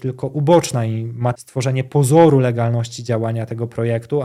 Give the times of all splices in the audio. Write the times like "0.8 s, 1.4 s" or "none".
1.3 s